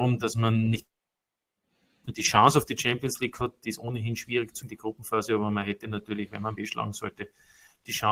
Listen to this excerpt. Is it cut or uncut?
cut